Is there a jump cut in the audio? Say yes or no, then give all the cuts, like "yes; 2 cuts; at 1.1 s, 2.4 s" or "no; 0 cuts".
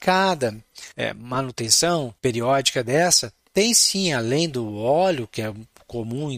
yes; 2 cuts; at 0.9 s, 2.2 s